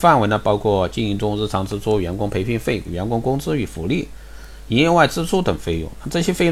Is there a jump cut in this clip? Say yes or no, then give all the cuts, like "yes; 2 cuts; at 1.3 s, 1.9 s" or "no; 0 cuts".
yes; 1 cut; at 2.8 s